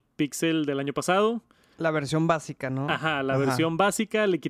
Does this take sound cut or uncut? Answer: uncut